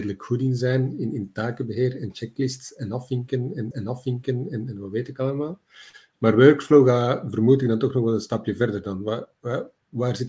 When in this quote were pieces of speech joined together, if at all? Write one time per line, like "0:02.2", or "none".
0:03.7